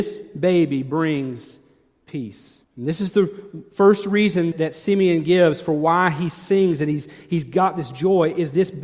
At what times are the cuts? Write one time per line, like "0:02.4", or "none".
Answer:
0:02.6
0:04.5